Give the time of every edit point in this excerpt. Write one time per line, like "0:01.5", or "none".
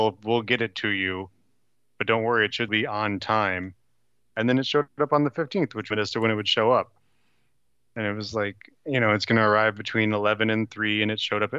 0:02.7
0:05.9